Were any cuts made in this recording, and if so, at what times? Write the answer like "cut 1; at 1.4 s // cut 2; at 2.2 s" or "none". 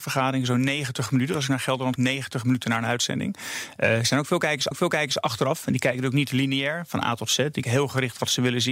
cut 1; at 2.0 s // cut 2; at 4.7 s // cut 3; at 7.6 s